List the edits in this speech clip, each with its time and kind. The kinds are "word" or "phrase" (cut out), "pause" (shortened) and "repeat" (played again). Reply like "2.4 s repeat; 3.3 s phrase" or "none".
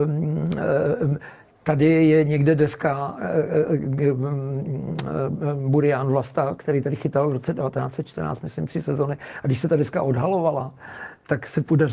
none